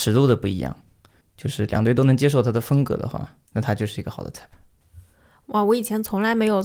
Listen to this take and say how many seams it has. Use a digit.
1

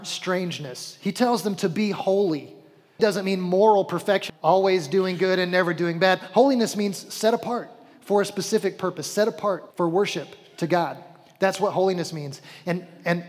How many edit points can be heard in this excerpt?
3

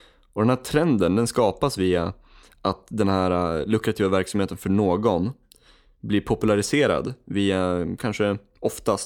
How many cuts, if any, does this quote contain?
0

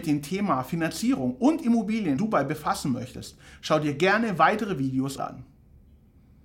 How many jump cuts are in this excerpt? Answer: 2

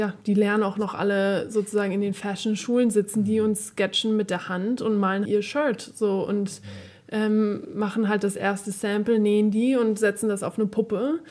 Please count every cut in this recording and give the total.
1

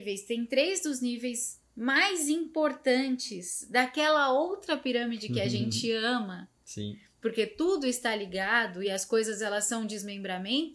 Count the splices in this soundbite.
0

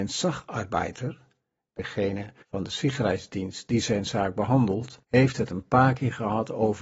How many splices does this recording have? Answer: 2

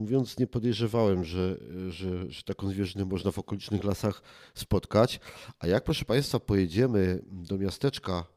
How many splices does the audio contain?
0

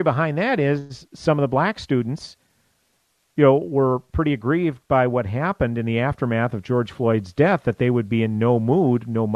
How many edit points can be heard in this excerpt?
0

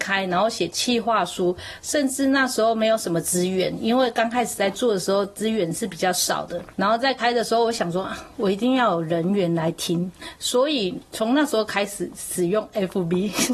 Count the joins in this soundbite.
0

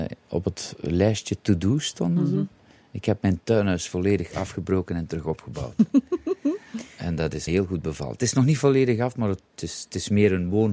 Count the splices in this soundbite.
1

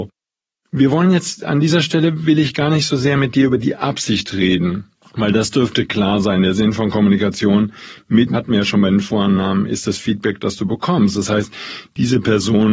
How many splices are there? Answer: 2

